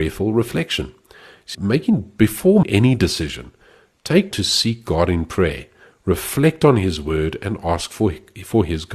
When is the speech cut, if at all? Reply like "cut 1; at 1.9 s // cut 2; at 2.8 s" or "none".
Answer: cut 1; at 1.5 s // cut 2; at 2.6 s // cut 3; at 4.3 s